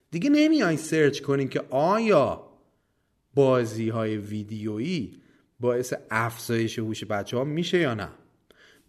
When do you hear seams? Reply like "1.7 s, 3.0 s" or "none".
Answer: none